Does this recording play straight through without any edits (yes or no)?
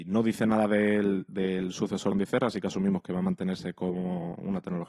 no